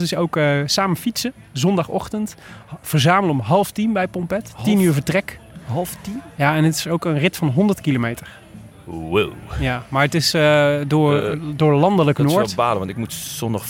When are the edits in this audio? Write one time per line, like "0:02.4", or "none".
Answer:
none